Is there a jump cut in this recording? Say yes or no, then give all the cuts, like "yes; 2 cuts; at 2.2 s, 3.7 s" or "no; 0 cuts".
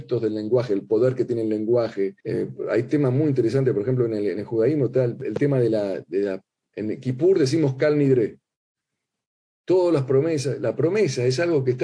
yes; 1 cut; at 2.2 s